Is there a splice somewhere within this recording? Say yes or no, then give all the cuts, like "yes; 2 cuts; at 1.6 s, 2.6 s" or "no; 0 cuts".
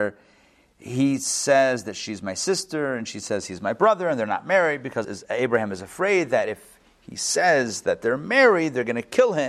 yes; 1 cut; at 5.0 s